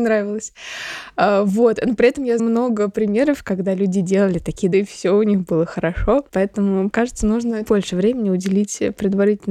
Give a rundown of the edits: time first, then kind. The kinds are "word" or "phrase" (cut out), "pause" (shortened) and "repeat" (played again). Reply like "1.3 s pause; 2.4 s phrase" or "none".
2.4 s word; 4.7 s word; 6.9 s word; 7.7 s word